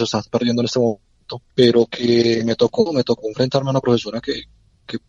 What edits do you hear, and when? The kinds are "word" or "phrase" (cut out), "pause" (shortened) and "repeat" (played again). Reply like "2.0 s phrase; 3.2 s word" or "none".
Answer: none